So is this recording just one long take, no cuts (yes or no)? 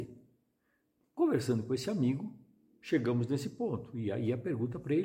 yes